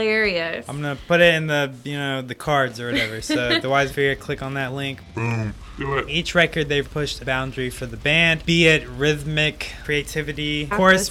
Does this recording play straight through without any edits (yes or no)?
no